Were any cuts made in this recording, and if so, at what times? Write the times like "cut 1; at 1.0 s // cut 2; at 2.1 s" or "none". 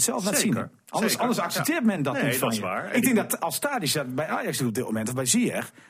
none